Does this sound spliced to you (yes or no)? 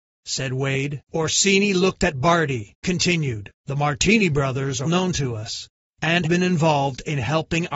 yes